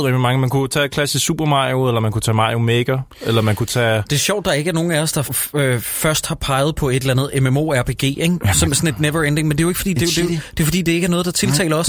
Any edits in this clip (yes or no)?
yes